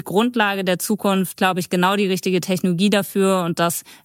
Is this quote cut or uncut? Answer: cut